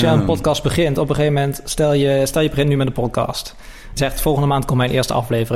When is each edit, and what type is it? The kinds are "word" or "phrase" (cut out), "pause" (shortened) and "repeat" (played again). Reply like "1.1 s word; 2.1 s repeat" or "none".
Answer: 4.0 s word

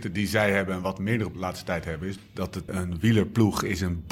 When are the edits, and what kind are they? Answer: 1.3 s word; 2.2 s word; 2.7 s word

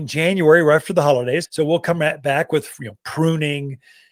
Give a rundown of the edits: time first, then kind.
1.4 s word

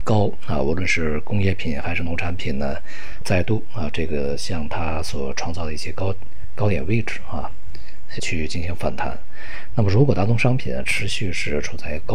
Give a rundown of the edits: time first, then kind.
3.2 s word; 8.2 s word

